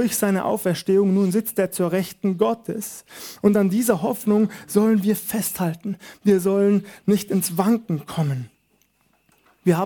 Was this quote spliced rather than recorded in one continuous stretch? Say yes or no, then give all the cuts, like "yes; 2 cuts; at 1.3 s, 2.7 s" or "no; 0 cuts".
no; 0 cuts